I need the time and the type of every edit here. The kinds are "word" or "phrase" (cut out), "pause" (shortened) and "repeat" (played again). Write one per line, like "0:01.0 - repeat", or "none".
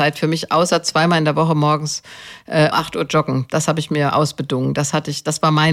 0:02.7 - word